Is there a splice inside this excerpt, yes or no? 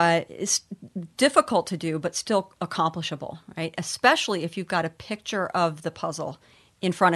no